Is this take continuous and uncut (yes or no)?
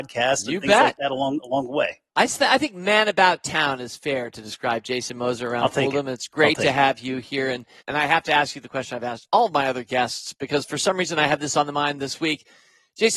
no